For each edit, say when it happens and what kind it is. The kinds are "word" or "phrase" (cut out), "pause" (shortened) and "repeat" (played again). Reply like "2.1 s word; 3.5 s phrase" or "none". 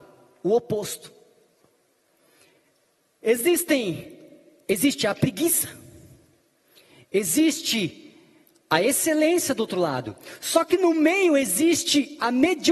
none